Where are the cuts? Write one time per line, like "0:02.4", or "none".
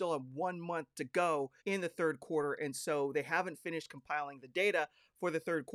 0:01.6